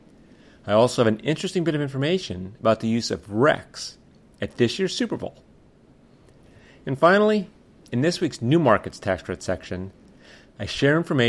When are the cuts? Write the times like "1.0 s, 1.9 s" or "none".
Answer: none